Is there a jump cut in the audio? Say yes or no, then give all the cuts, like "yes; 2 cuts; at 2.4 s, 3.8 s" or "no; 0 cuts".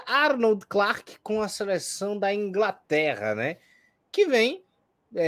no; 0 cuts